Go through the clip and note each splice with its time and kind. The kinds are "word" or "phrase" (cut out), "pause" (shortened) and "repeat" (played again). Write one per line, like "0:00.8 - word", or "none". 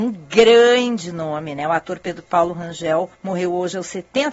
0:03.1 - pause